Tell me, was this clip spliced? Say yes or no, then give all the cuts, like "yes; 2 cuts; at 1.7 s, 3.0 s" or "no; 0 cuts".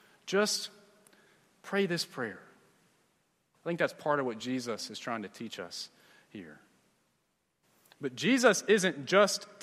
no; 0 cuts